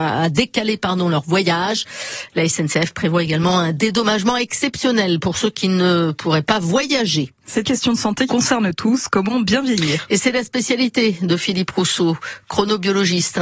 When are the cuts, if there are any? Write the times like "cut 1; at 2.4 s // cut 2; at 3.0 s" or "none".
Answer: cut 1; at 7.6 s // cut 2; at 8.3 s